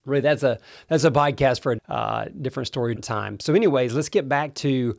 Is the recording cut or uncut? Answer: cut